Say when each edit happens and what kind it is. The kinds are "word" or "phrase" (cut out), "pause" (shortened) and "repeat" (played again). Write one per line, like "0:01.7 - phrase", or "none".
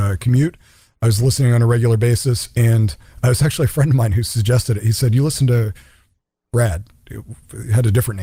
none